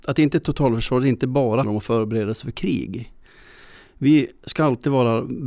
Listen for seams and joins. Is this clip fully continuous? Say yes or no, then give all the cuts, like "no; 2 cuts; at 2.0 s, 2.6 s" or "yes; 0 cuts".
no; 1 cut; at 1.6 s